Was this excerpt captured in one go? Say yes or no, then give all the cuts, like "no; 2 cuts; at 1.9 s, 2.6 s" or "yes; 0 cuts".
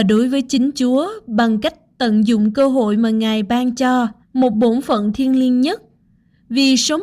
no; 1 cut; at 4.2 s